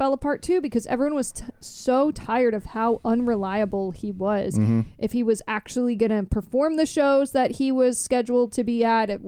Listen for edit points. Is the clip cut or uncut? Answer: uncut